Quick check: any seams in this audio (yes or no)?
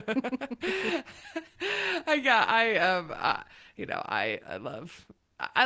no